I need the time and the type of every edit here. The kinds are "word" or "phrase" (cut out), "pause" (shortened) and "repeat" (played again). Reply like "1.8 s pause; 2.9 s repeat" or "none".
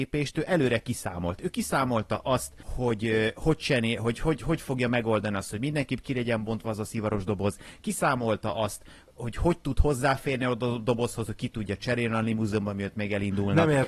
2.6 s pause